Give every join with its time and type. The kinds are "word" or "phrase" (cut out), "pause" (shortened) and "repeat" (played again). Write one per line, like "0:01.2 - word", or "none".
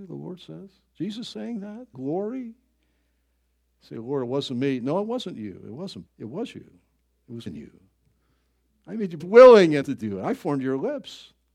0:01.9 - word
0:06.1 - word
0:07.5 - word
0:09.2 - word
0:09.8 - word